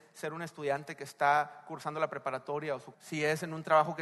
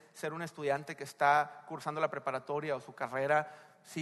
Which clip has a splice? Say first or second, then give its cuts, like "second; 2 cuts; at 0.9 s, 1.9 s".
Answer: first; 1 cut; at 2.9 s